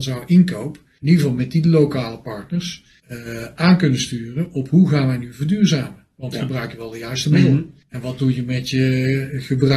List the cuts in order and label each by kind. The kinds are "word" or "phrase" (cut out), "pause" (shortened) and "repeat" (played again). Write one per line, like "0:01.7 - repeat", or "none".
none